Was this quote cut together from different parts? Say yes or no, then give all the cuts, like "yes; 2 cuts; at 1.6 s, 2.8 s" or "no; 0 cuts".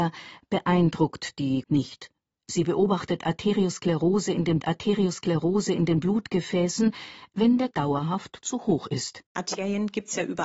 yes; 4 cuts; at 1.6 s, 4.6 s, 7.7 s, 9.3 s